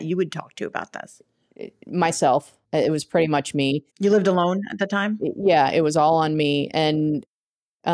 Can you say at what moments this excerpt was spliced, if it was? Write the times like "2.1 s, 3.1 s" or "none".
2.6 s, 3.9 s